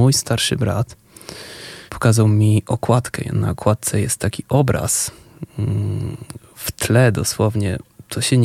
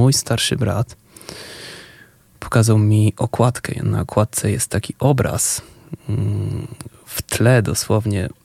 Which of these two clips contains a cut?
first; 1 cut; at 1.9 s

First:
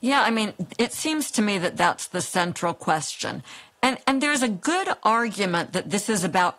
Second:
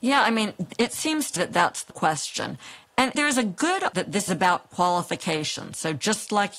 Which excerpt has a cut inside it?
second; 5 cuts; at 1.4 s, 1.9 s, 3.2 s, 3.9 s, 4.3 s

